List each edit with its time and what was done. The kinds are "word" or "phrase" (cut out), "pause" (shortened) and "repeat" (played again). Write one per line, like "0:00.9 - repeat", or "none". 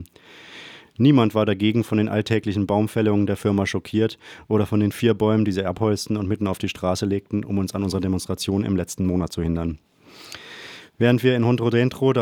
0:10.9 - pause